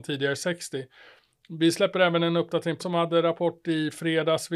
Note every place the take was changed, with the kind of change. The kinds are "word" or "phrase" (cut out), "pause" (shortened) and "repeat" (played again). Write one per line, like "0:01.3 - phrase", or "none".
0:02.8 - word

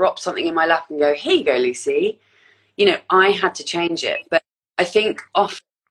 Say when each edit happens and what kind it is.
none

